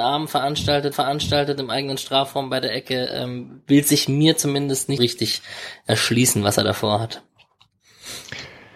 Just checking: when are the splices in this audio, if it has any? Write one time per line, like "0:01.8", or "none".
0:00.9
0:05.0